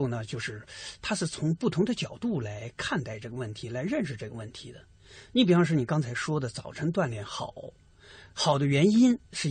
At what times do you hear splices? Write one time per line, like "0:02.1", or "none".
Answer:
none